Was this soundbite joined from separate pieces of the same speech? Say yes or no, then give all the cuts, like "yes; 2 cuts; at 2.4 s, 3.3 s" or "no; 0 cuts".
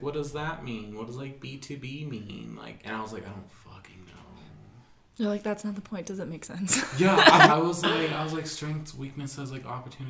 no; 0 cuts